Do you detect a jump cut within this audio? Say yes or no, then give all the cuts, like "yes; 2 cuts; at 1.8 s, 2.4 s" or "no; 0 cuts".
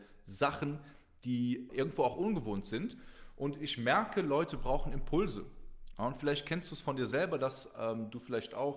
yes; 1 cut; at 1.7 s